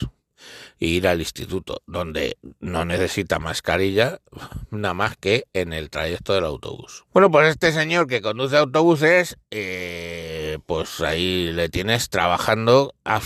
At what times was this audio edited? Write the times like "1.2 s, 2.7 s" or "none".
7.1 s